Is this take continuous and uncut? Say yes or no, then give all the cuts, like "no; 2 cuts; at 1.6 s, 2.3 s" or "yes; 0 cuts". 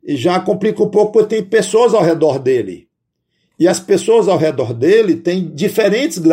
yes; 0 cuts